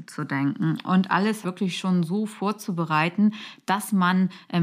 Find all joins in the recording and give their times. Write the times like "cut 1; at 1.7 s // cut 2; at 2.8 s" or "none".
cut 1; at 1.4 s